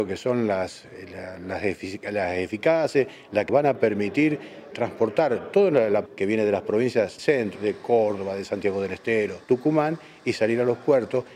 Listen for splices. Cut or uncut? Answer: cut